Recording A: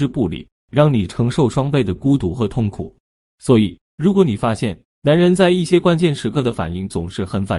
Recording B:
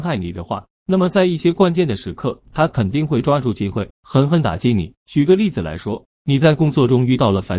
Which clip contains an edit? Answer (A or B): B